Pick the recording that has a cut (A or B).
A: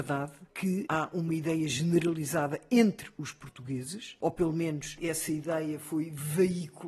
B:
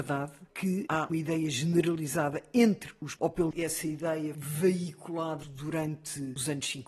B